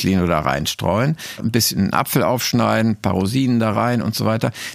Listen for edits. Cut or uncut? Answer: cut